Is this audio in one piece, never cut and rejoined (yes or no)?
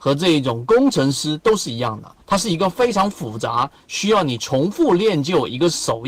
no